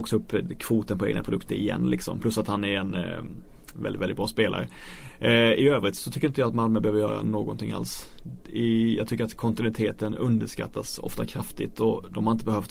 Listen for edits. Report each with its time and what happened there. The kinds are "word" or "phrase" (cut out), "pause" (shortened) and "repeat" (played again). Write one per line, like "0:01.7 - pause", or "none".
none